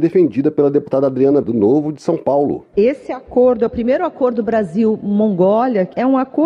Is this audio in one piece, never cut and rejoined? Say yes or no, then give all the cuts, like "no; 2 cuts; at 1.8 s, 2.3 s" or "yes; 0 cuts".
no; 1 cut; at 1.4 s